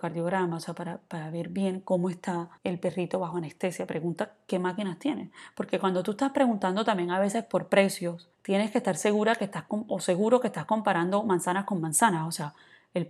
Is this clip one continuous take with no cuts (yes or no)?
no